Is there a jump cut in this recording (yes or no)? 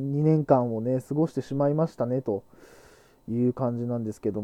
no